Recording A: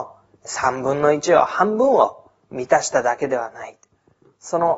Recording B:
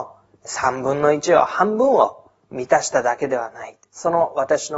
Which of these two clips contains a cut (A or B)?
B